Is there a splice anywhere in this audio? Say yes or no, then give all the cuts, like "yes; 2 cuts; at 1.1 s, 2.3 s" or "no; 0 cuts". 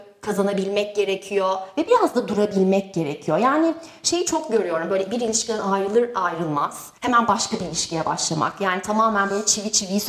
yes; 1 cut; at 7.0 s